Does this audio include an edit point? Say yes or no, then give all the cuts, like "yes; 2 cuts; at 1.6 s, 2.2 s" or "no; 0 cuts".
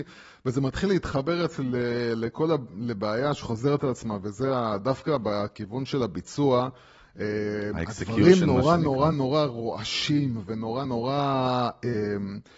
yes; 2 cuts; at 9.1 s, 10.8 s